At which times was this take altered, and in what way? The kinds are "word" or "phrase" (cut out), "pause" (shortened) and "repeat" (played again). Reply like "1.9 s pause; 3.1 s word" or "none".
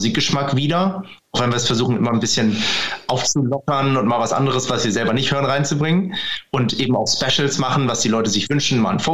none